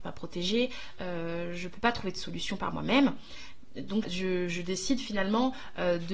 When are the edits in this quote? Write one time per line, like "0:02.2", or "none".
0:04.0